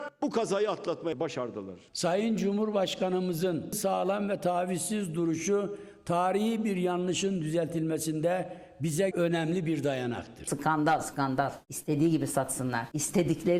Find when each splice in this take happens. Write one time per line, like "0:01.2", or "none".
0:09.1